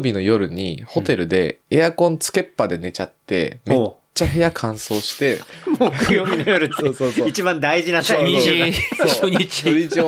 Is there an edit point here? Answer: yes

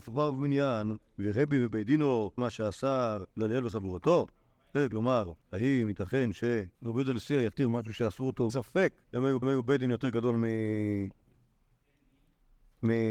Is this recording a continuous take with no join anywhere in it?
no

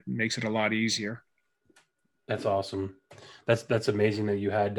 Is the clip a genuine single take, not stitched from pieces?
yes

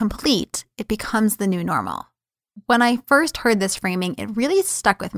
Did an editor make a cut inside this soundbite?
no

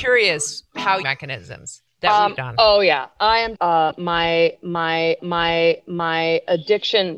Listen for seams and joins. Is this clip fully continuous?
no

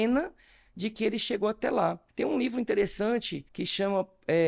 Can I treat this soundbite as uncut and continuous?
no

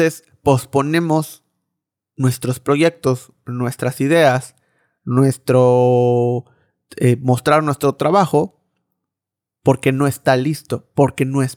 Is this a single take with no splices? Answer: yes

